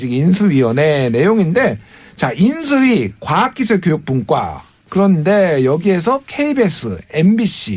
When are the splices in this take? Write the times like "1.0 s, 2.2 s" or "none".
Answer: none